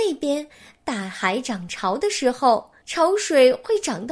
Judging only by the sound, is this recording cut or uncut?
cut